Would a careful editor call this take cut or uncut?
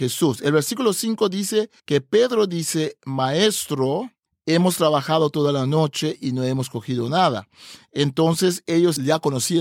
cut